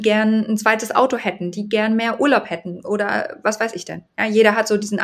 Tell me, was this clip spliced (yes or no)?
no